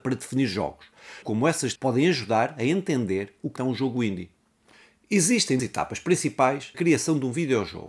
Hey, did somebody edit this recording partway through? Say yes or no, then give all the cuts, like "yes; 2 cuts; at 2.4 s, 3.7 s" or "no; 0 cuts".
yes; 5 cuts; at 1.2 s, 1.8 s, 3.6 s, 5.6 s, 6.7 s